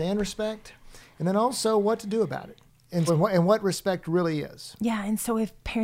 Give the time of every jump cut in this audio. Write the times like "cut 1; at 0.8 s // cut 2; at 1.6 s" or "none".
cut 1; at 3.1 s